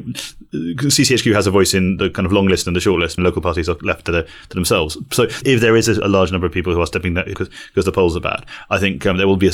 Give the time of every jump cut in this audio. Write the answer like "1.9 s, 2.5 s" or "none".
3.2 s, 5.4 s, 6.0 s, 7.3 s